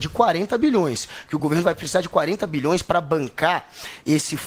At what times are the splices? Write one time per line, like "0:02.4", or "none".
none